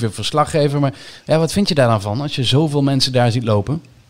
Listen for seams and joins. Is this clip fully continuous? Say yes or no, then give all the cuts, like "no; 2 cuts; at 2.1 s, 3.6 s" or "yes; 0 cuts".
yes; 0 cuts